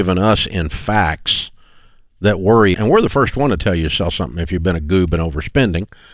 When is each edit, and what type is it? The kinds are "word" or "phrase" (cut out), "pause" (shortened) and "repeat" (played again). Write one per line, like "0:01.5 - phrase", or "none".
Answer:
0:02.7 - word

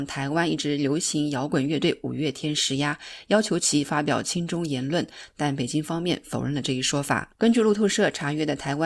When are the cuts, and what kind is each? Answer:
0:07.4 - pause

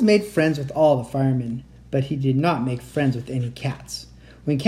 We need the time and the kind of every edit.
none

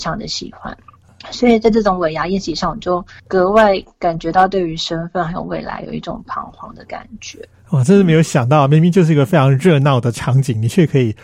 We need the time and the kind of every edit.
0:03.2 - pause

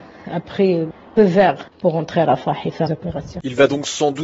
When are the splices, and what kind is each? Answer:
0:01.2 - word
0:01.7 - pause
0:02.9 - word

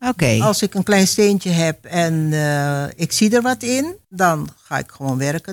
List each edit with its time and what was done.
0:04.0 - pause

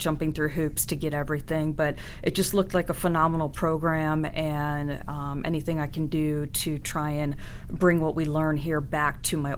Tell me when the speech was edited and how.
none

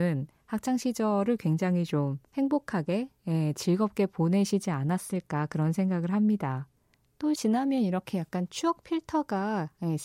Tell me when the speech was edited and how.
0:02.2 - pause
0:07.4 - word

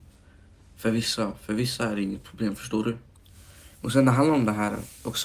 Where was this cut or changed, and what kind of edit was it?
0:03.7 - pause

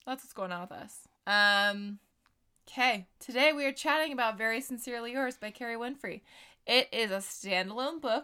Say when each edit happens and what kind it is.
0:01.2 - pause
0:03.1 - pause

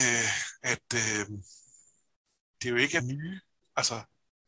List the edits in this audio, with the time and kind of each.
0:02.6 - word
0:03.0 - phrase

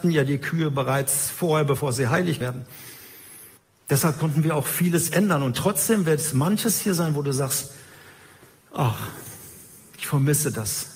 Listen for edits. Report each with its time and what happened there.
0:02.4 - word
0:03.6 - pause
0:05.1 - word

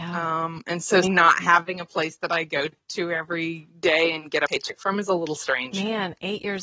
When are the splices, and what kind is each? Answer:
0:01.0 - word

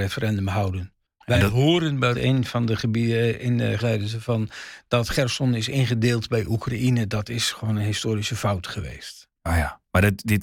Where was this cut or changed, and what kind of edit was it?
0:01.0 - pause
0:02.1 - word
0:03.8 - word

